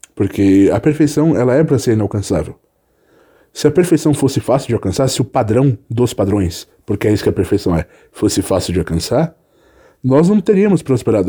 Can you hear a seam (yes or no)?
no